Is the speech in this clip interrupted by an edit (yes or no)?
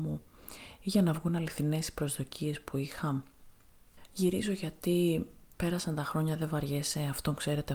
no